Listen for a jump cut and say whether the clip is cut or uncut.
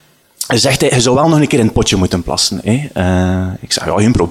uncut